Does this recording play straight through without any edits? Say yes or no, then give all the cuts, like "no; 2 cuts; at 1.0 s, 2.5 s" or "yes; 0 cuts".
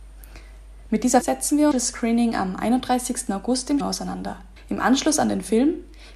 no; 4 cuts; at 1.2 s, 1.7 s, 3.8 s, 4.6 s